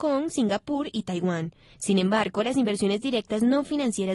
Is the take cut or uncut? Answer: uncut